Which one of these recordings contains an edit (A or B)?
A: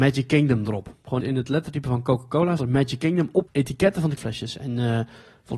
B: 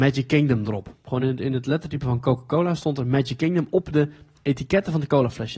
A